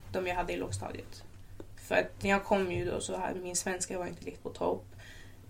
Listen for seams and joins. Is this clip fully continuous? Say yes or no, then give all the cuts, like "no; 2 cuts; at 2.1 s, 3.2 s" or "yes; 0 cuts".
no; 1 cut; at 2.2 s